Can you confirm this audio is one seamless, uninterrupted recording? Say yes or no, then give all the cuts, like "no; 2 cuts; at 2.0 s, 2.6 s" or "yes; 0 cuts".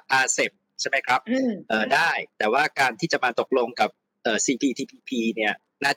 yes; 0 cuts